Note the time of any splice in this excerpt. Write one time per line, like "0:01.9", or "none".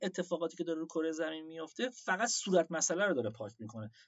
none